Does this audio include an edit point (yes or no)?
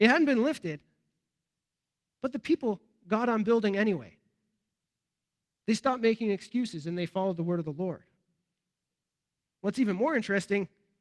no